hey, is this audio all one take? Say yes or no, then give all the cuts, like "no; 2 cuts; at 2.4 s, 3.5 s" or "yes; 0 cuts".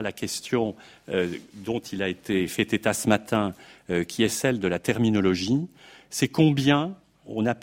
yes; 0 cuts